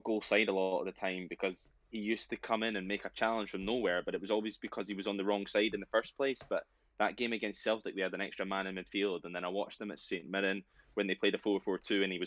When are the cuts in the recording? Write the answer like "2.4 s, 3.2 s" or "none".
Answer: none

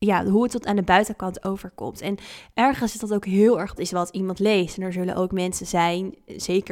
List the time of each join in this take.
3.8 s

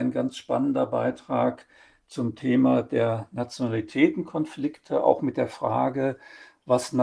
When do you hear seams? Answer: none

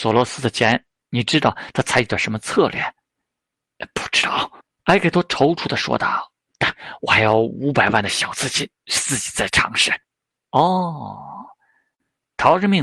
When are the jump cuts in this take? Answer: 4.6 s, 10.0 s

